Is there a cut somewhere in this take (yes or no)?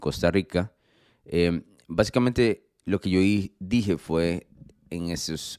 no